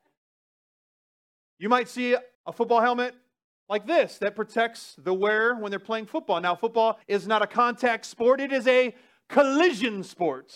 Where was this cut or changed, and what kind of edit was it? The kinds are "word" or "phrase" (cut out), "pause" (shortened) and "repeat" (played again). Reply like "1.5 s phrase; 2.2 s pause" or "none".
2.3 s pause; 7.0 s pause